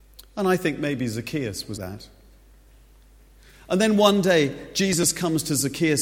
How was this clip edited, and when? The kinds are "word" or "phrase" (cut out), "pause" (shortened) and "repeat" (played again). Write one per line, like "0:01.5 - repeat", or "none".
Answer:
0:01.7 - phrase

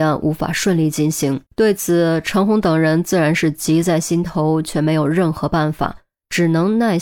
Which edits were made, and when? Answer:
0:01.5 - pause

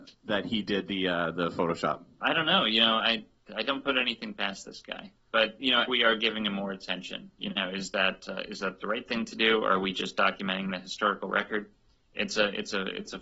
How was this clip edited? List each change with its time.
0:05.9 - phrase

